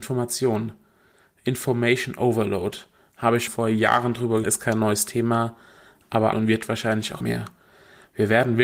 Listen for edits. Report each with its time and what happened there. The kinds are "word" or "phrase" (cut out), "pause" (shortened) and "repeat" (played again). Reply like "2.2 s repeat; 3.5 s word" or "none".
3.5 s word; 4.4 s word; 6.3 s word; 7.2 s word